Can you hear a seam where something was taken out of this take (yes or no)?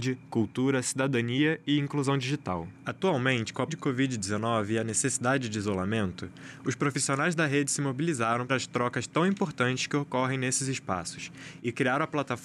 yes